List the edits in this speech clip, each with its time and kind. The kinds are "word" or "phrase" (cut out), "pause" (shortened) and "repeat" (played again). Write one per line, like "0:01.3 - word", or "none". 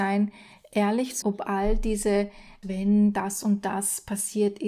0:01.2 - word
0:02.6 - word